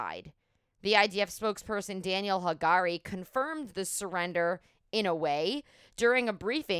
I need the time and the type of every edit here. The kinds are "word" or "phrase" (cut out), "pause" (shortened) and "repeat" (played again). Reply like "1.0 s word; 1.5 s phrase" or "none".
none